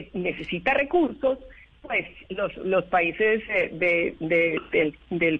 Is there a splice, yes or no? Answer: no